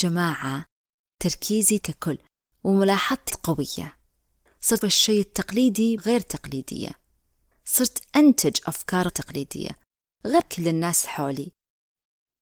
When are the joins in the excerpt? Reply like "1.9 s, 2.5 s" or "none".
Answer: 1.8 s, 3.3 s, 4.8 s, 6.0 s, 7.5 s, 9.1 s, 10.4 s